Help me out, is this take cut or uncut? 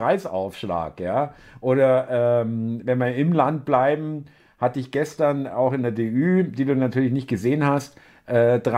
uncut